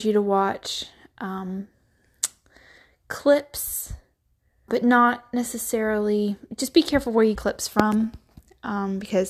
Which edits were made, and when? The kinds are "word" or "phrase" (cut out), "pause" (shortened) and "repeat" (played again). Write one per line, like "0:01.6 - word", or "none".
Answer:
0:04.7 - word
0:07.4 - phrase